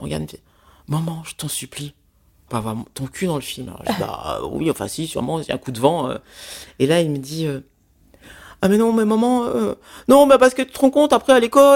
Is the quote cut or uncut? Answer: cut